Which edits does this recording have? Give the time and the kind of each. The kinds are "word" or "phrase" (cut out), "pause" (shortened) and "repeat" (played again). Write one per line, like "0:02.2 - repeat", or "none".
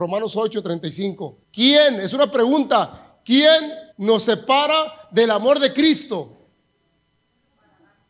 0:01.4 - pause
0:03.9 - pause

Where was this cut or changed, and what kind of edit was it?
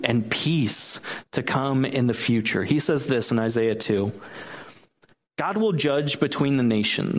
none

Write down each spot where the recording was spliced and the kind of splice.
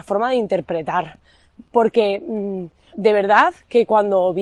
0:02.9 - word

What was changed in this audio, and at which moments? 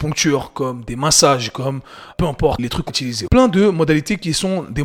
0:02.1 - word
0:02.6 - word
0:02.9 - word
0:03.3 - word

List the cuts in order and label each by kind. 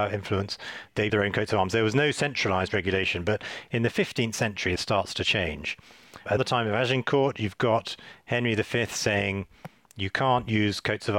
0:01.1 - word
0:04.8 - word
0:06.4 - word

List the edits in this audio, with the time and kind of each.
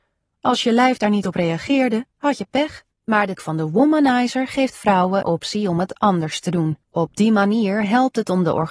0:02.1 - pause
0:02.9 - pause
0:03.4 - word
0:05.2 - word
0:06.8 - pause

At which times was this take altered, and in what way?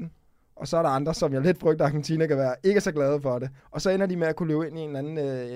0:03.6 - pause

